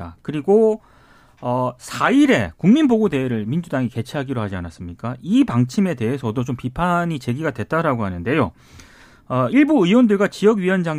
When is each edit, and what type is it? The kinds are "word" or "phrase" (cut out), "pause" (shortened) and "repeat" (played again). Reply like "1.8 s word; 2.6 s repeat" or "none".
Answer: none